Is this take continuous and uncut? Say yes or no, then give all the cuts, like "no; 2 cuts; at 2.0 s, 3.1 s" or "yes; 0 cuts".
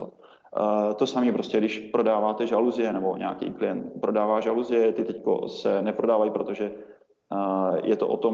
yes; 0 cuts